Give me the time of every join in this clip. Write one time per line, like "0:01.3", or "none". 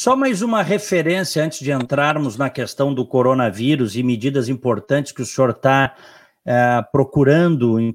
none